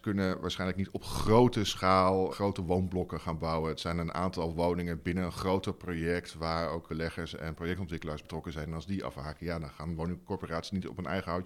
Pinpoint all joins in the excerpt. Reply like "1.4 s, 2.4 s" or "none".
2.3 s, 6.9 s, 8.2 s